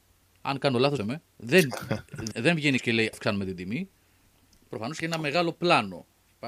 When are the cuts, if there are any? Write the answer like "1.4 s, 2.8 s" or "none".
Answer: 1.0 s, 1.3 s, 2.3 s, 2.8 s, 3.1 s, 5.0 s